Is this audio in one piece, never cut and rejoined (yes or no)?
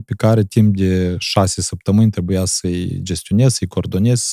yes